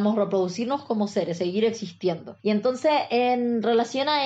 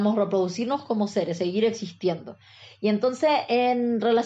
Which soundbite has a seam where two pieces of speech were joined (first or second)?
first